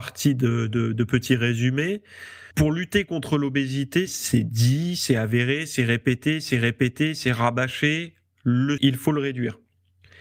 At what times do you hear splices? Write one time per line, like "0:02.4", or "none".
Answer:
0:02.5
0:04.1
0:06.5
0:08.8